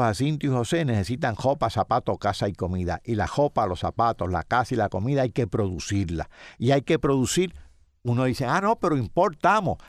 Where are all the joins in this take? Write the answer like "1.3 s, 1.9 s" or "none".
none